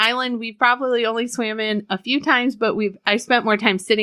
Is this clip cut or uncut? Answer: uncut